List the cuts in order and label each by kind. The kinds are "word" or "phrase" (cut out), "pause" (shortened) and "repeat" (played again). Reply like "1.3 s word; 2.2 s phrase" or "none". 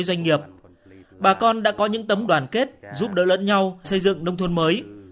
2.3 s word; 3.8 s word